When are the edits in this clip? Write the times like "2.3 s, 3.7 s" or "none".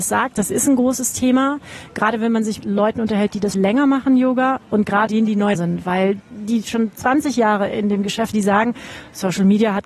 2.6 s, 3.5 s, 5.1 s, 5.5 s, 6.2 s, 8.3 s